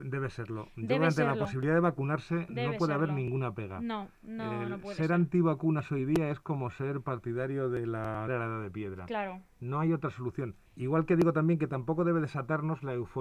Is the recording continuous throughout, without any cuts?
no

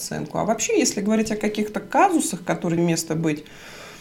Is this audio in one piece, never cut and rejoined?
no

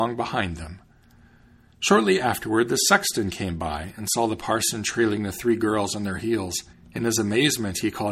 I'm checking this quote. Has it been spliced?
yes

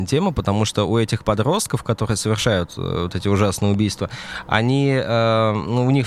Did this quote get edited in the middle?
no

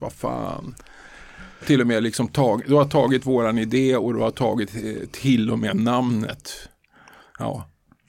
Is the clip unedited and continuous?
no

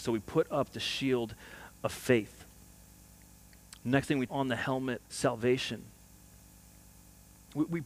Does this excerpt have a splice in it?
yes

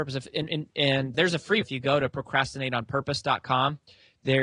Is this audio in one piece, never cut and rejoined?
no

